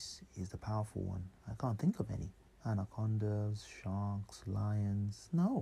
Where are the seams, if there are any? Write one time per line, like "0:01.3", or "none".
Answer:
0:02.5